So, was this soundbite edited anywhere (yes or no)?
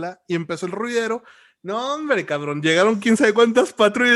no